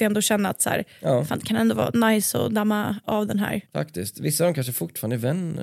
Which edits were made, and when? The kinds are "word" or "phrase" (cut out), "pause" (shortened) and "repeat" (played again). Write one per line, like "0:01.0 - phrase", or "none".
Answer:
none